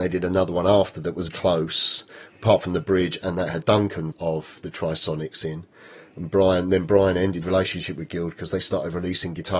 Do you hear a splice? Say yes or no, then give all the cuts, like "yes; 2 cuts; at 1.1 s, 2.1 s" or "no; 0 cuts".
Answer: yes; 4 cuts; at 1.3 s, 3.6 s, 4.1 s, 7.4 s